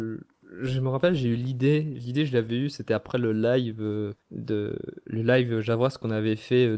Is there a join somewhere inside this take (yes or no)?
yes